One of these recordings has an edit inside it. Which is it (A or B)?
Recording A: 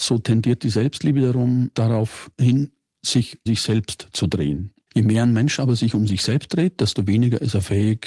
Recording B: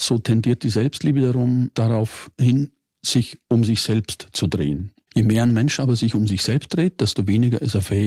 A